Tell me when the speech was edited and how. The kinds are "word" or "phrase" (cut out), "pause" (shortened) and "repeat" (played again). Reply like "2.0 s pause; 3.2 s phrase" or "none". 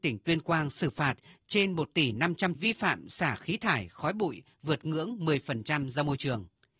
2.6 s phrase

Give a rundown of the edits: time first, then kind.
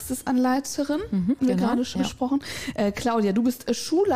1.4 s word; 1.9 s word

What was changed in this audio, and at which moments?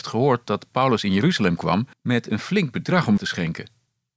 1.9 s pause; 3.2 s word

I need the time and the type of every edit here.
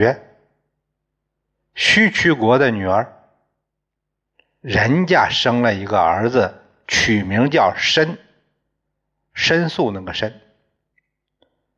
none

